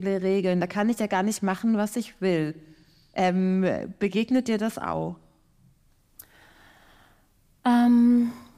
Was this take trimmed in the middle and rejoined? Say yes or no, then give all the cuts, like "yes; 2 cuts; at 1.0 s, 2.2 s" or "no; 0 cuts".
no; 0 cuts